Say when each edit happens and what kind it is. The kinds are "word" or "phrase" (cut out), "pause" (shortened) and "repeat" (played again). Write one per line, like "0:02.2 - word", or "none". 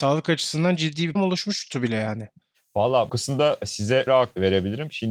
0:01.2 - word
0:03.1 - word
0:04.1 - word